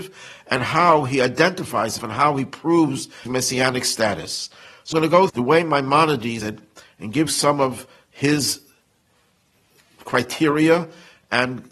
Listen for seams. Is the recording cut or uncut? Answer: cut